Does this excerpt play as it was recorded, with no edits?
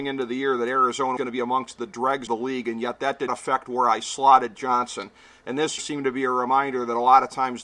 no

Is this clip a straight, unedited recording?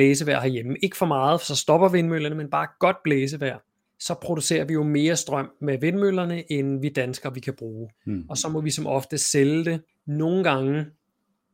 no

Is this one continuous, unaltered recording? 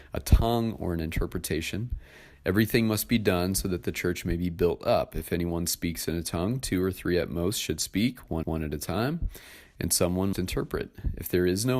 no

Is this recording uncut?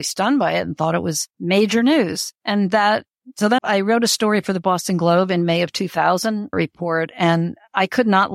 no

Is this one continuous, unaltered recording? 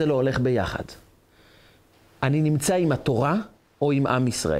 yes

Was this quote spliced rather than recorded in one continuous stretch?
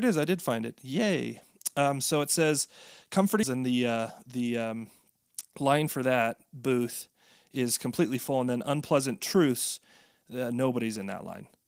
yes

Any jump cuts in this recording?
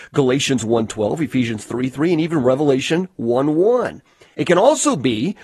no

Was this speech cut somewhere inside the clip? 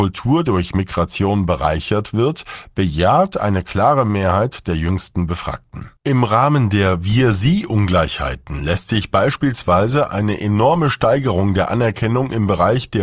yes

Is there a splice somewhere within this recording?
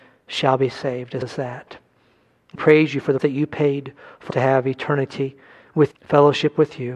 yes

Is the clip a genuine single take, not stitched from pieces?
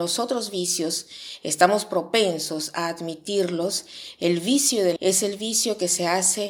no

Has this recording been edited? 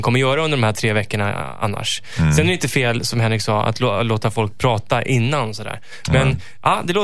no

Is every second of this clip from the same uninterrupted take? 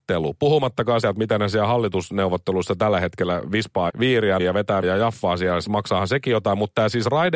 no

